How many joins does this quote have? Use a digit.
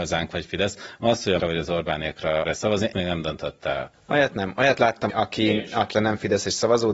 5